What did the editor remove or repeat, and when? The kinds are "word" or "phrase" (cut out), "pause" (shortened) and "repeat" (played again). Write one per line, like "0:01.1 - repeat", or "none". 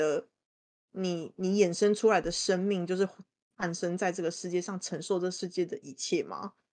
none

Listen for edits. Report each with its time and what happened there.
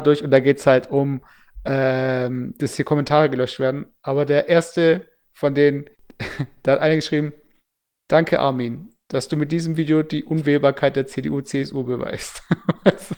0:05.9 - pause

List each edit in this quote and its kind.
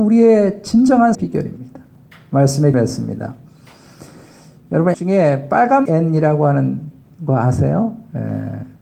0:01.1 - word
0:02.7 - word
0:04.9 - word
0:05.8 - word

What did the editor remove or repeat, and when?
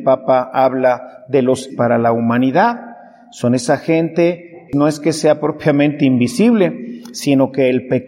0:01.7 - word
0:04.7 - word

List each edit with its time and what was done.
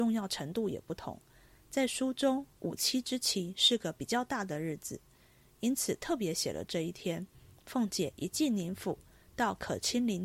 none

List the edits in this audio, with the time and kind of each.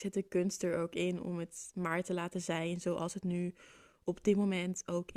none

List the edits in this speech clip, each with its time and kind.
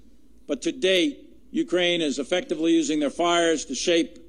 0:01.4 - pause

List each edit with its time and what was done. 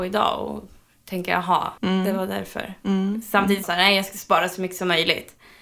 0:01.8 - pause
0:03.6 - phrase

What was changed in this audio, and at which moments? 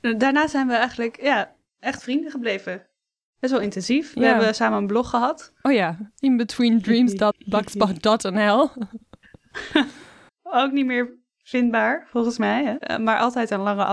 none

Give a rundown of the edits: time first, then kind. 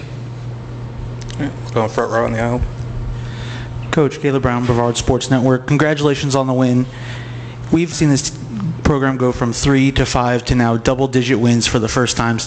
0:07.9 - word

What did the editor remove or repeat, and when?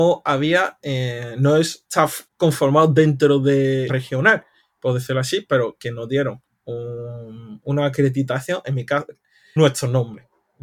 0:02.3 - pause
0:03.9 - word
0:06.5 - pause
0:09.6 - word

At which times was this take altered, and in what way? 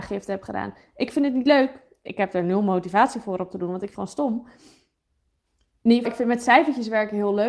0:03.9 - word
0:06.0 - word

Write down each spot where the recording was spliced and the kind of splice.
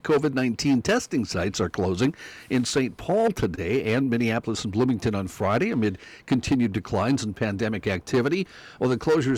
none

